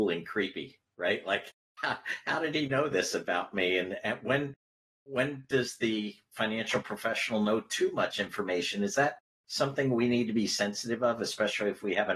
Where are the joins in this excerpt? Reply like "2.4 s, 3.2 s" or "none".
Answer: none